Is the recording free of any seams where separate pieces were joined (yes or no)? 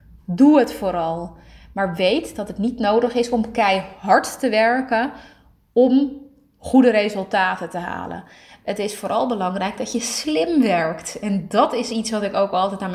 yes